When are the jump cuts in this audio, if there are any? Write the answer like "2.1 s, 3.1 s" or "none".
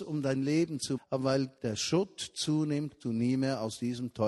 1.0 s, 1.6 s, 3.0 s